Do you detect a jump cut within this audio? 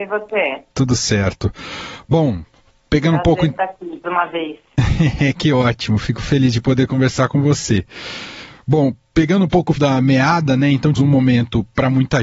yes; 3 cuts; at 4.0 s, 9.8 s, 10.9 s

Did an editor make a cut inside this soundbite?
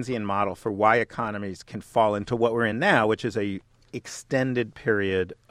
no; 0 cuts

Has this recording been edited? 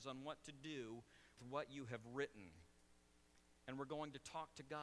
yes; 2 cuts; at 1.4 s, 3.6 s

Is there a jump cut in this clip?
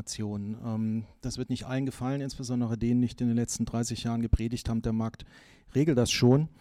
no; 0 cuts

